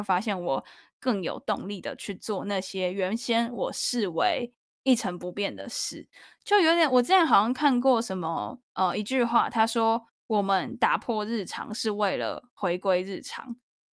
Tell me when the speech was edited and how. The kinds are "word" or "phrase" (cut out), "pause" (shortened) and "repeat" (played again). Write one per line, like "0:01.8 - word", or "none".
0:08.7 - pause